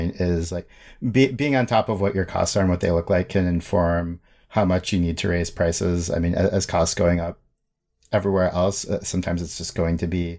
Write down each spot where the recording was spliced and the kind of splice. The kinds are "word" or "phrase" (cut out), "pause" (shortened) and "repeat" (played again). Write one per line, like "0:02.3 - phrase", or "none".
none